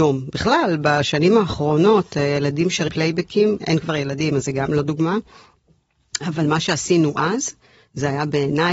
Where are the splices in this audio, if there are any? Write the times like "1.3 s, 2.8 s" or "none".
2.9 s, 3.6 s